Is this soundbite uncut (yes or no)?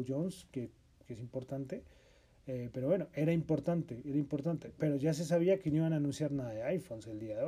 yes